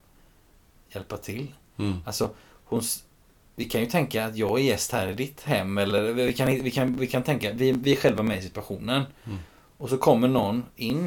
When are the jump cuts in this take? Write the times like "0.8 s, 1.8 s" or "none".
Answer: none